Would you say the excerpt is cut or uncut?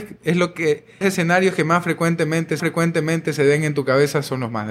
cut